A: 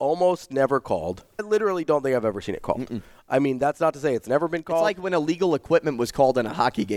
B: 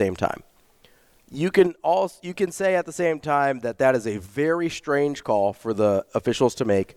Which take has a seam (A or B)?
A